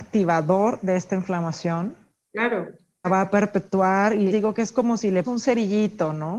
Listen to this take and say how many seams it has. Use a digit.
3